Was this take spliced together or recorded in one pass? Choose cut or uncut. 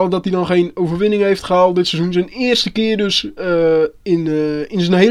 uncut